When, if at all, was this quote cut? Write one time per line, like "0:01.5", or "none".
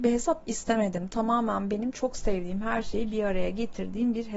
none